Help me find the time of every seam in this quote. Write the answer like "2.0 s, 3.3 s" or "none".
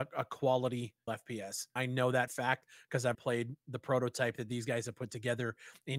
1.1 s, 1.8 s, 2.3 s, 3.1 s